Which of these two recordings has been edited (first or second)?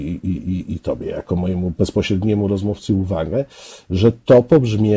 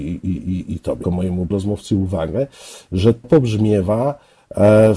second